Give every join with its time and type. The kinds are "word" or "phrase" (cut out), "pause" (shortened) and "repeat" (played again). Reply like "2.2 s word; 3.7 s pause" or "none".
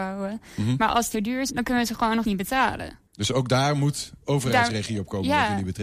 1.1 s phrase; 1.5 s word; 2.2 s word; 3.1 s pause; 4.2 s pause